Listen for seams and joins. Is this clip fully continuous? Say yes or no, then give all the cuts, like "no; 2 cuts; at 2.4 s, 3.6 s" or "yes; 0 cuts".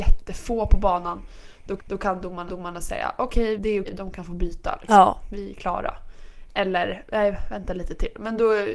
no; 4 cuts; at 1.8 s, 2.5 s, 3.6 s, 3.9 s